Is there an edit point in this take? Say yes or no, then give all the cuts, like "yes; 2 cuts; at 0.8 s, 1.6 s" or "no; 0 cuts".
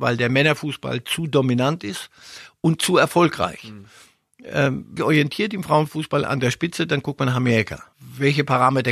yes; 1 cut; at 5.0 s